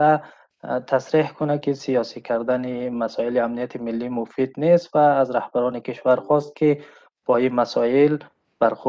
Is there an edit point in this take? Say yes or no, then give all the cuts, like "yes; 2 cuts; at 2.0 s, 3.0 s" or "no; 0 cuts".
no; 0 cuts